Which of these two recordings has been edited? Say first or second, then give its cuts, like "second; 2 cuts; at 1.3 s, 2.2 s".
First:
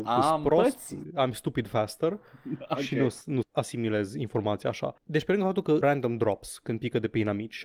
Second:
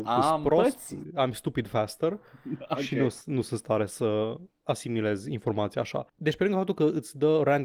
first; 2 cuts; at 3.4 s, 5.8 s